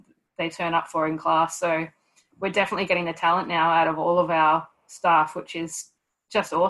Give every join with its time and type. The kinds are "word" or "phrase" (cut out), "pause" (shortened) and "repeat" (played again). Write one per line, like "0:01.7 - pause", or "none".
none